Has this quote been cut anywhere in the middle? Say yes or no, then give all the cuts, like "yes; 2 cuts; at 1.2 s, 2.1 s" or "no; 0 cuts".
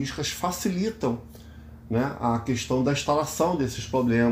no; 0 cuts